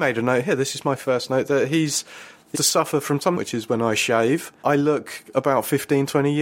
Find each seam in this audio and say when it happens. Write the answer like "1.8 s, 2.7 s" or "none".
2.5 s, 3.4 s, 4.6 s